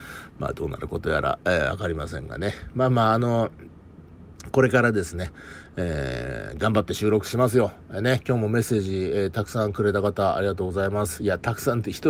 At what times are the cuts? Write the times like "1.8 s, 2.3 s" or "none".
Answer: none